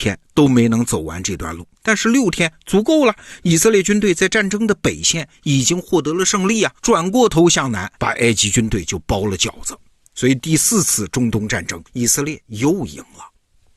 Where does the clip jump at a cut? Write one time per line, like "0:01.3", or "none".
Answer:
0:01.7
0:06.8
0:08.0
0:11.9

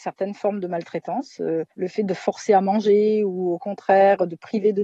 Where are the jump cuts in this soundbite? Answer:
0:01.7

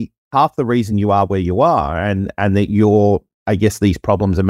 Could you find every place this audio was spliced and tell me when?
none

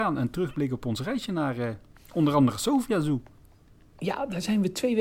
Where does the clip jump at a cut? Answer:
0:01.9

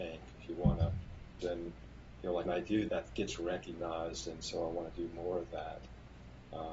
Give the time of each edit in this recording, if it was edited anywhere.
0:01.4
0:02.5
0:02.9

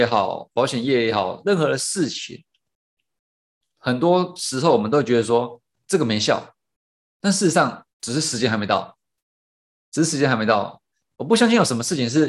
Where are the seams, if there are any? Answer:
0:05.8
0:07.9

